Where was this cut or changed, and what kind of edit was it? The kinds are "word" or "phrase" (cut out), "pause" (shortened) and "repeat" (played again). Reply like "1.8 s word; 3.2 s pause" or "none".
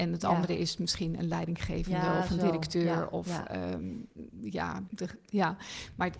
4.9 s word